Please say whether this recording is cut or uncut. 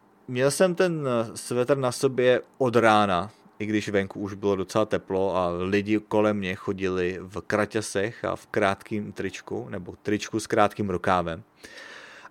uncut